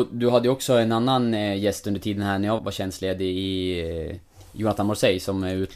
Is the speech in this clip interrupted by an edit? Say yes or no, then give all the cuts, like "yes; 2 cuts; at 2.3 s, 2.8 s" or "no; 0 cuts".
yes; 1 cut; at 2.6 s